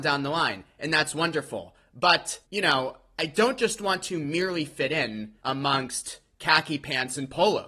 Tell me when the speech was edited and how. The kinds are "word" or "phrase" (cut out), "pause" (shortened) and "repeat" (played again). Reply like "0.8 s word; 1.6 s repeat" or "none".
2.4 s pause; 5.4 s pause